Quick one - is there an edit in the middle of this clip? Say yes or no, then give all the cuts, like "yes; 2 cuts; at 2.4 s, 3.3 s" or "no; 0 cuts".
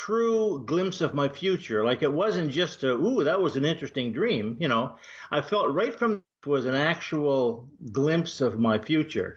yes; 1 cut; at 6.3 s